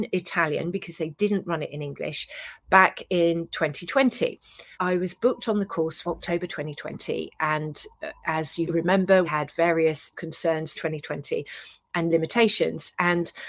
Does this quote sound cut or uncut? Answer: cut